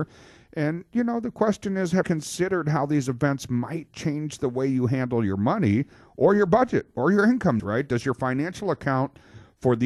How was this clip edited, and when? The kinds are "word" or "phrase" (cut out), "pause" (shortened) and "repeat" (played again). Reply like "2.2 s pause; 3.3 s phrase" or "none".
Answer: 2.0 s word; 7.6 s word

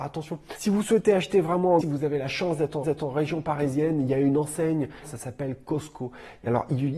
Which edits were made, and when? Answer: 1.8 s phrase; 2.8 s repeat

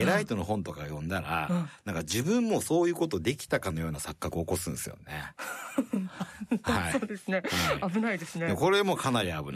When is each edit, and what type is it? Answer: 6.6 s word

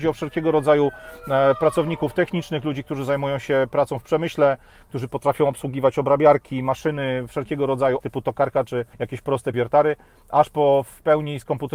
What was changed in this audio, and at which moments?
8.0 s phrase; 8.9 s pause; 9.5 s word

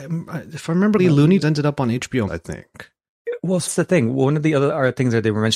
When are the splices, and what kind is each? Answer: 1.0 s word; 1.4 s word; 2.3 s word; 3.7 s word

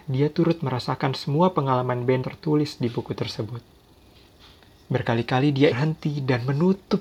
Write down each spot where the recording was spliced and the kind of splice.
2.2 s word; 5.7 s word

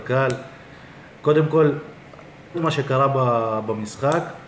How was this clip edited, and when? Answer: 2.5 s word

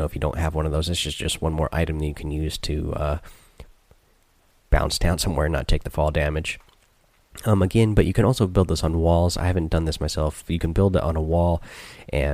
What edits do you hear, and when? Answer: none

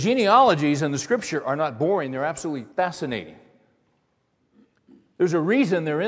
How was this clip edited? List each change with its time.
2.7 s pause

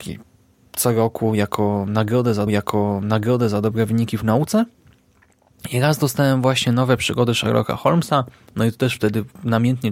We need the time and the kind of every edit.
2.5 s repeat

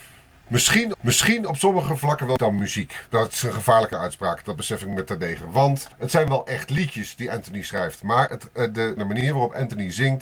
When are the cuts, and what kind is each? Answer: 0.9 s repeat; 2.4 s phrase; 3.1 s pause; 5.9 s pause; 9.0 s phrase

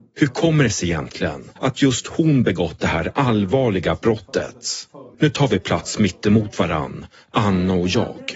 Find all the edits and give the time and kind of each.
1.6 s pause; 5.1 s pause

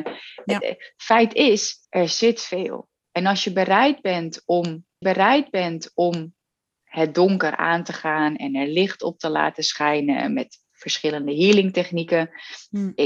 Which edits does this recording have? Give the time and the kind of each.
1.8 s pause; 5.0 s repeat; 10.7 s pause

